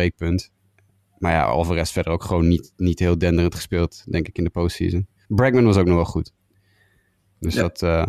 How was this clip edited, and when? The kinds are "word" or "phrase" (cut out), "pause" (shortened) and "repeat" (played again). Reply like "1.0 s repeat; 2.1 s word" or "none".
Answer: none